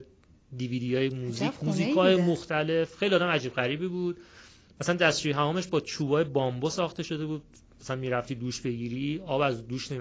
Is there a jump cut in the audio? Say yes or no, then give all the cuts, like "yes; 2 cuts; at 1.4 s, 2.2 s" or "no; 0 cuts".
no; 0 cuts